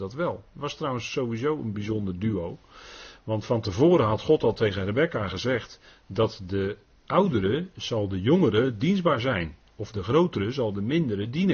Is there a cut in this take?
no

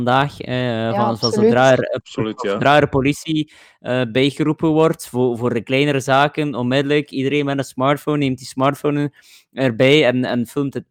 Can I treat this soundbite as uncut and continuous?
yes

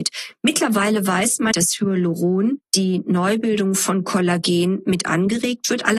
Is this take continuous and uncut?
no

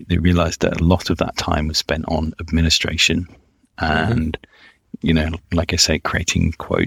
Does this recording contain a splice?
no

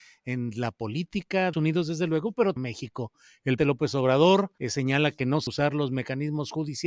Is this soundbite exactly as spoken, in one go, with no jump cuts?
no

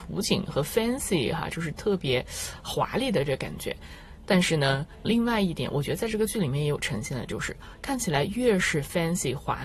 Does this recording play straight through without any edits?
no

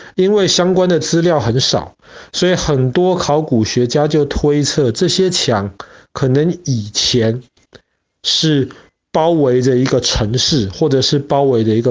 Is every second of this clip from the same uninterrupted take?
yes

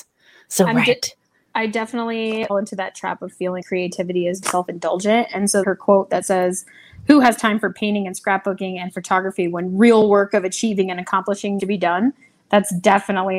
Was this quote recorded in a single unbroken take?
no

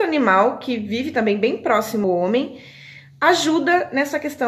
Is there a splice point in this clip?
yes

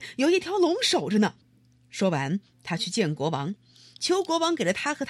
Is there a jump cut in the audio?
yes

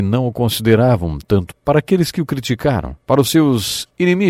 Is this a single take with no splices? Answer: no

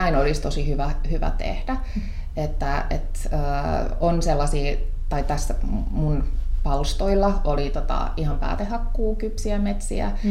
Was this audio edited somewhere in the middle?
no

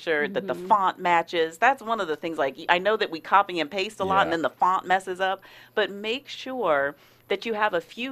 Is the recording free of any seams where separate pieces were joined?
yes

